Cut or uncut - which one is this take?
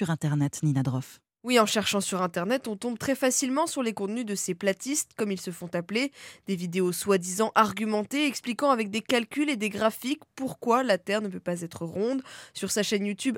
uncut